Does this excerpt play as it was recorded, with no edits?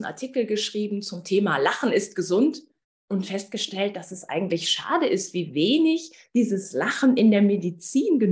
yes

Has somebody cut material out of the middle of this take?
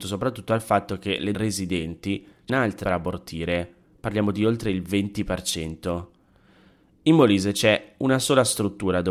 yes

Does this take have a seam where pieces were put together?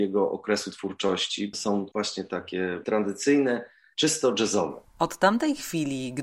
no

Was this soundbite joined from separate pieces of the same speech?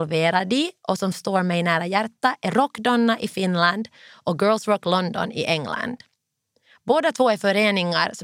no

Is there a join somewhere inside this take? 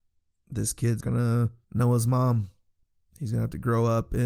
yes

